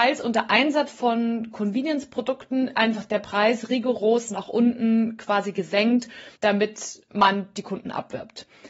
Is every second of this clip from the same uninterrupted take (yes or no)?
no